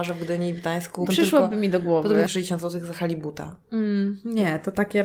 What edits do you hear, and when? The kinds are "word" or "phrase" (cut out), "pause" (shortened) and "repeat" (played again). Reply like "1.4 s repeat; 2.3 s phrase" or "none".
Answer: 1.0 s word; 2.3 s phrase